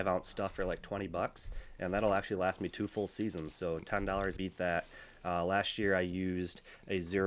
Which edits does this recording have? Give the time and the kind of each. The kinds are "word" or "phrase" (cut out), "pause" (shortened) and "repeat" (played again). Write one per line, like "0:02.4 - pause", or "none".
0:04.4 - phrase